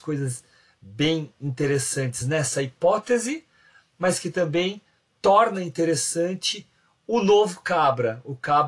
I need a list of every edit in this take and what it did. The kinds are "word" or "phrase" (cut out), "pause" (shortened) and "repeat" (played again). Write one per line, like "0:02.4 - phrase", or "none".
none

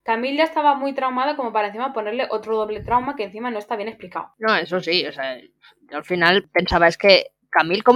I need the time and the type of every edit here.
none

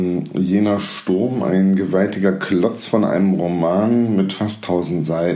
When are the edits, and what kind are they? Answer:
none

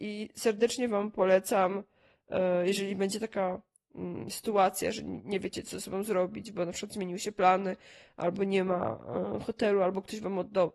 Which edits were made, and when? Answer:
none

